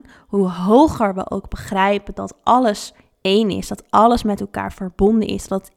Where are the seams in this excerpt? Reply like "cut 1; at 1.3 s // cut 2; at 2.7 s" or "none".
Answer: none